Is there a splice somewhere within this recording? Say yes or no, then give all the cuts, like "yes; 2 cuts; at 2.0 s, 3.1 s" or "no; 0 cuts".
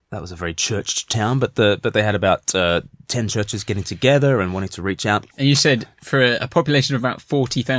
yes; 1 cut; at 5.3 s